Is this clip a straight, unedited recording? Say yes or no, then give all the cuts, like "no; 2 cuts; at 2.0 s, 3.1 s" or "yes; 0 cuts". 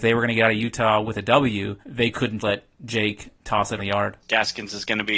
no; 5 cuts; at 1.8 s, 2.4 s, 2.7 s, 3.8 s, 4.2 s